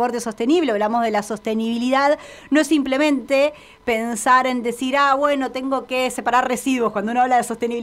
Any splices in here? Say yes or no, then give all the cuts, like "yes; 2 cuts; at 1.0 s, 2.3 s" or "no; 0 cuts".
no; 0 cuts